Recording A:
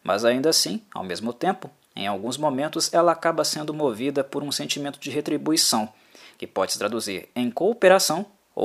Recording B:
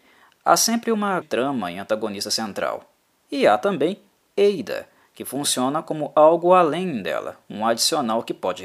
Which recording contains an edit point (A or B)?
B